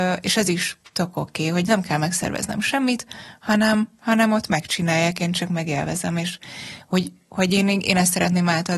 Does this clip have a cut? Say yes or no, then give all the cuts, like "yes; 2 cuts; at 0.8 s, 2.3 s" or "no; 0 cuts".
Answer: no; 0 cuts